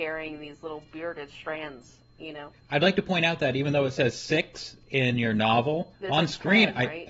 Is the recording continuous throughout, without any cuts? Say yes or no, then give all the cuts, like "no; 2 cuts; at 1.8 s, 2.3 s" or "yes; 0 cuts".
no; 2 cuts; at 2.6 s, 5.9 s